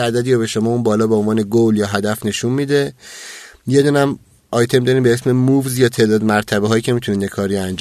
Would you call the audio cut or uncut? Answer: uncut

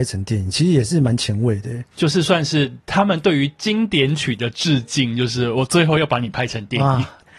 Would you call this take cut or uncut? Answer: cut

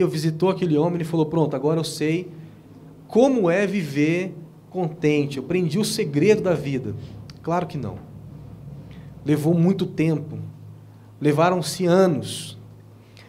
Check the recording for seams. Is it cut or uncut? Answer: uncut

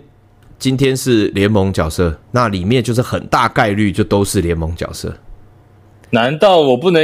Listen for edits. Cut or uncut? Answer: cut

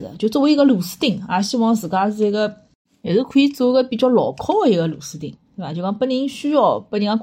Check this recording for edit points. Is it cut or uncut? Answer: cut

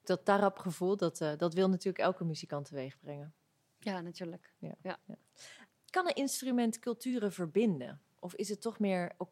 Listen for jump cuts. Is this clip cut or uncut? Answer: uncut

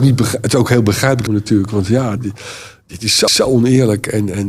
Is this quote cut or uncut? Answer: cut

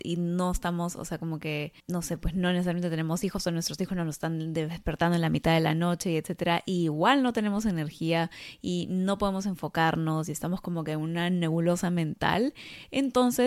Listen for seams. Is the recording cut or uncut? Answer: cut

